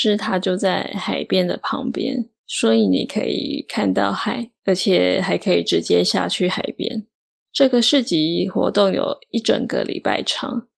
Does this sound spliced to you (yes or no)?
yes